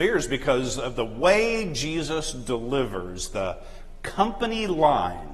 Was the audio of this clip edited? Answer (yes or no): no